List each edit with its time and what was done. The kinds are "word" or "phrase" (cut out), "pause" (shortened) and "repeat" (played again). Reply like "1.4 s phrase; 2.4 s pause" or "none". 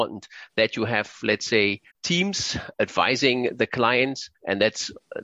1.9 s pause; 4.3 s pause